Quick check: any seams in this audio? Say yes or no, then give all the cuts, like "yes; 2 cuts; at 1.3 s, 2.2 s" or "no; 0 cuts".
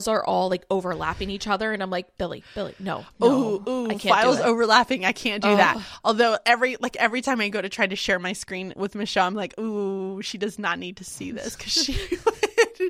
no; 0 cuts